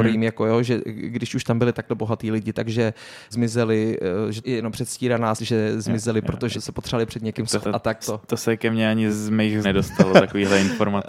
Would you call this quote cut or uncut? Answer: cut